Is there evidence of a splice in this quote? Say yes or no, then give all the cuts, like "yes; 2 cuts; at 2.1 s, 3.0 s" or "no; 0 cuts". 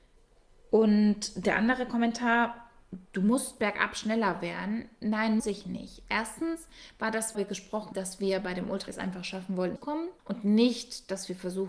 yes; 7 cuts; at 3.1 s, 5.4 s, 7.3 s, 7.9 s, 8.9 s, 9.8 s, 10.2 s